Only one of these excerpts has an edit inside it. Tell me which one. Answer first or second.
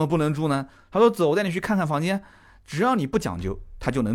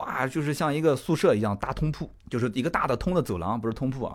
second